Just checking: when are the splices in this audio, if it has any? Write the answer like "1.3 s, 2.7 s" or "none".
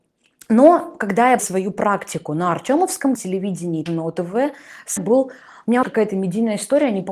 1.4 s, 3.1 s, 3.9 s, 5.0 s, 5.8 s